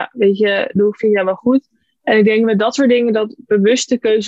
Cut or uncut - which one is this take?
uncut